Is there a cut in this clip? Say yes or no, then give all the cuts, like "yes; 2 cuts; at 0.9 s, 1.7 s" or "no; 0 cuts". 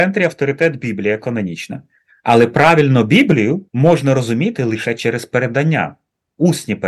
yes; 1 cut; at 3.7 s